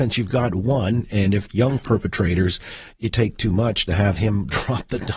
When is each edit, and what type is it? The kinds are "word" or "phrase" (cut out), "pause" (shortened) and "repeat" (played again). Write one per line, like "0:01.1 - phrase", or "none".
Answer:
0:01.5 - word
0:03.1 - word